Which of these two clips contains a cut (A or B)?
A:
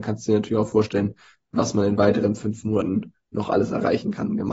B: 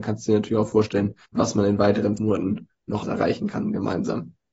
B